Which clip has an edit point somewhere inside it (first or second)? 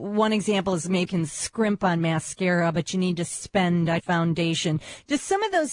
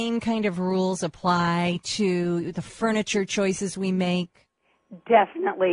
first